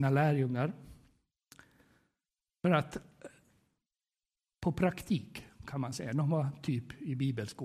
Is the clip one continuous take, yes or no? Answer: yes